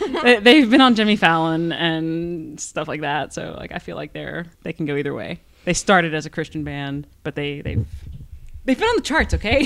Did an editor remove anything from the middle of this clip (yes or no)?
yes